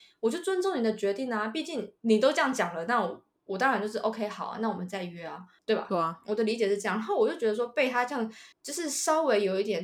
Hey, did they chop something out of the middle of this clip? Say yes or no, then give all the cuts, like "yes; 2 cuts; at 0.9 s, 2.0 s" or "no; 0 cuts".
yes; 1 cut; at 8.5 s